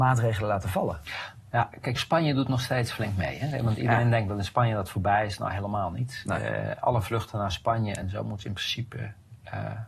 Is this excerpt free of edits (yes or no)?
yes